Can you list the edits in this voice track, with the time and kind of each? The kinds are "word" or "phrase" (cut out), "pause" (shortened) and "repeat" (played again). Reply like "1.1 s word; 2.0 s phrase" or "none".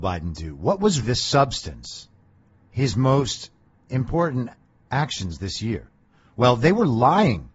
1.0 s word